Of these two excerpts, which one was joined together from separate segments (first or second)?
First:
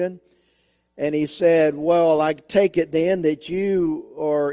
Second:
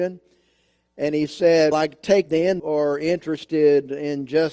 second